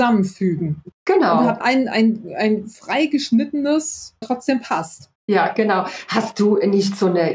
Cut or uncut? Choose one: cut